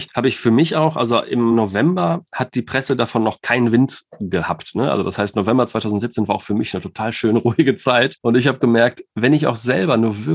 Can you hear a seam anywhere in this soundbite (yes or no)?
no